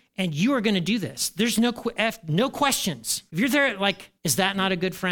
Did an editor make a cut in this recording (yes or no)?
yes